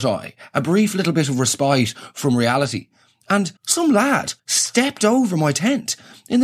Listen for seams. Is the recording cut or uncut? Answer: cut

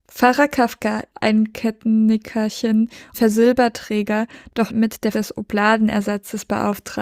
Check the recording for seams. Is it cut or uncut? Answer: cut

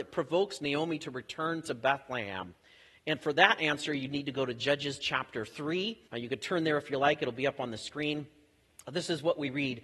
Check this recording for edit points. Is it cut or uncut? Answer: cut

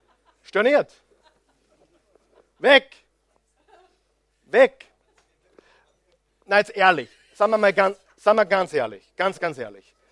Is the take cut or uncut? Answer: uncut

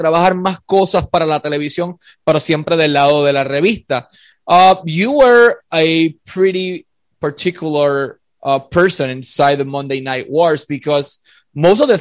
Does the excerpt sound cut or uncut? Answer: uncut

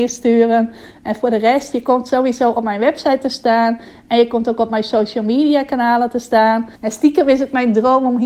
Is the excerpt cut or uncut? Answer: cut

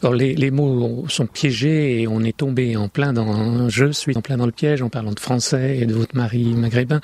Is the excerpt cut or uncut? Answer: cut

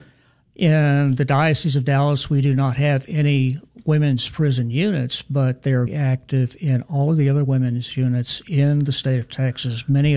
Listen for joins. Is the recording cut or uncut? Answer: cut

